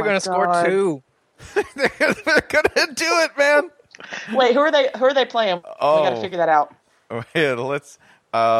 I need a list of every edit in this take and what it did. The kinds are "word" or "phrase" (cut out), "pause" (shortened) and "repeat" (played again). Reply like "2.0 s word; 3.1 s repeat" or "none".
none